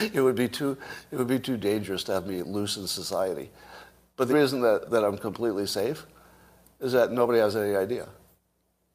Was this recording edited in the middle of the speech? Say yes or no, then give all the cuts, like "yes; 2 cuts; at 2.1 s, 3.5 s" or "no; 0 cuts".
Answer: yes; 2 cuts; at 4.3 s, 4.9 s